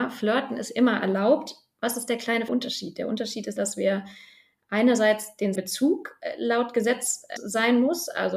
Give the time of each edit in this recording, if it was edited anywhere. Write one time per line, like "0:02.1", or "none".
0:02.5
0:03.6
0:05.5
0:07.4